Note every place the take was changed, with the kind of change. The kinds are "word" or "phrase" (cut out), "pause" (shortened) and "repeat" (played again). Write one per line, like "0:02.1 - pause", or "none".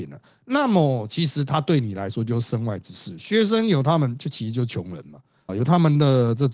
0:05.5 - word